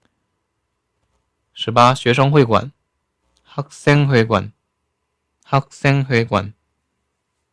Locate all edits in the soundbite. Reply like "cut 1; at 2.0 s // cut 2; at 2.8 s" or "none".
none